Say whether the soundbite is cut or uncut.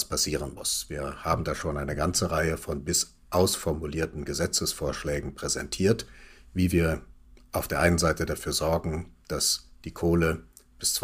uncut